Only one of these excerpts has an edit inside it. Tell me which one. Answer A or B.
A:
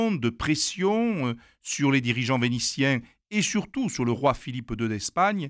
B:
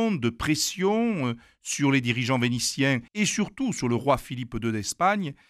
B